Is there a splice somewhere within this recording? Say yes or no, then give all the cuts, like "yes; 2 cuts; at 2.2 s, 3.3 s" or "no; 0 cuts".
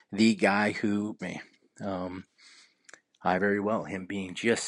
yes; 2 cuts; at 1.2 s, 3.4 s